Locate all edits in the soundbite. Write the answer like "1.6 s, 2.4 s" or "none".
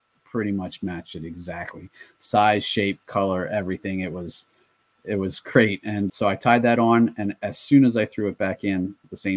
6.1 s